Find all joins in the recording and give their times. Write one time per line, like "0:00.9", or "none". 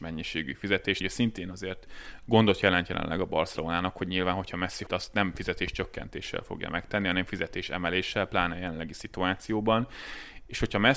0:01.0
0:04.9